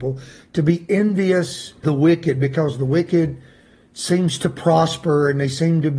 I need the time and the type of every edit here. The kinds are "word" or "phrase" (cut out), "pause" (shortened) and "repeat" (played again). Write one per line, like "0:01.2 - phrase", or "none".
0:01.8 - word